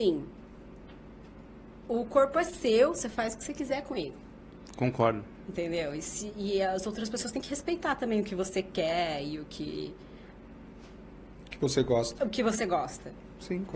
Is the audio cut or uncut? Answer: uncut